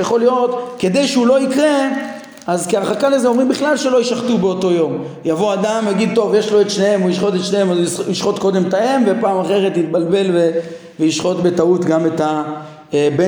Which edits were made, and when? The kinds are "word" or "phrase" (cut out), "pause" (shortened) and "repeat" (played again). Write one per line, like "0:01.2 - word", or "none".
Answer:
none